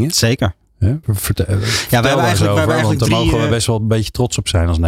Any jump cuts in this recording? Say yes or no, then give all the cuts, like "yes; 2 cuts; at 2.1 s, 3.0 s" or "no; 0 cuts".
yes; 1 cut; at 1.0 s